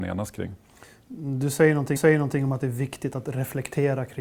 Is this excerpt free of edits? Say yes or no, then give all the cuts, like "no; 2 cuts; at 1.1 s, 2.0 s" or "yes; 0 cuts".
no; 1 cut; at 2.0 s